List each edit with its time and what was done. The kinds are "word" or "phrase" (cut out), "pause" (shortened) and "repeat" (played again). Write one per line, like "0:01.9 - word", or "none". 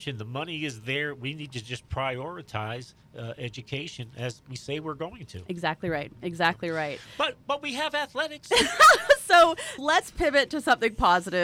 0:07.4 - pause
0:09.8 - word